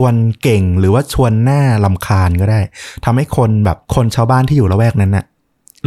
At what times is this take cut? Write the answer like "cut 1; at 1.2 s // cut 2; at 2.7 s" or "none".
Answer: cut 1; at 3.8 s